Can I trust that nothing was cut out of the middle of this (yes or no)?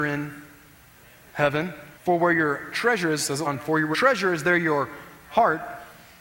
no